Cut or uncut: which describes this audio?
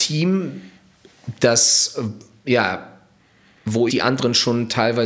cut